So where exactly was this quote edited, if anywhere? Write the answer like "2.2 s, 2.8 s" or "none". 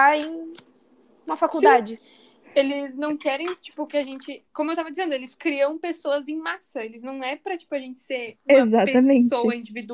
none